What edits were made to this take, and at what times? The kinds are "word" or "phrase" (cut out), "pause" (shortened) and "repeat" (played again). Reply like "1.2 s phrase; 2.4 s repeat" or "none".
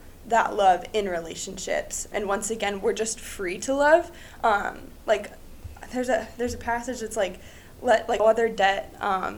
2.1 s word; 8.2 s word